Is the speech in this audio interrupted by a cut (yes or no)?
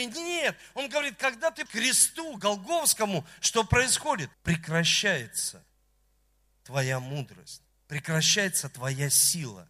yes